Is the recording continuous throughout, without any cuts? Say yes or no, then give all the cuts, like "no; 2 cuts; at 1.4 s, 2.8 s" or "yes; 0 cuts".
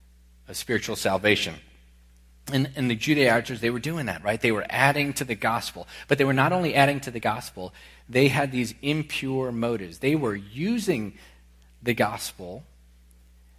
yes; 0 cuts